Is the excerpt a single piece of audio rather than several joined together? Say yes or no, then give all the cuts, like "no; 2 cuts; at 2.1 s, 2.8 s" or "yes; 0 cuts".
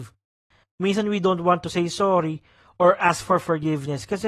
yes; 0 cuts